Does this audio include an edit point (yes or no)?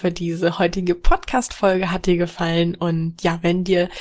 no